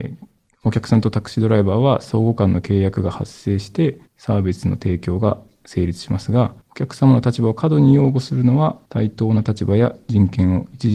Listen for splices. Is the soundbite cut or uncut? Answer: cut